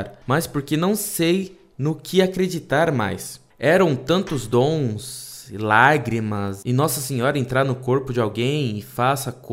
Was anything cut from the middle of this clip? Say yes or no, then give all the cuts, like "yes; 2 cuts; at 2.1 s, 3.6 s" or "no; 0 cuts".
no; 0 cuts